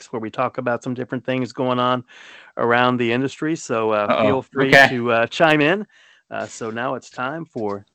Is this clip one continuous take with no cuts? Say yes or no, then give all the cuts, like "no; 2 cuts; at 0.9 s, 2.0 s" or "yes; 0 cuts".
yes; 0 cuts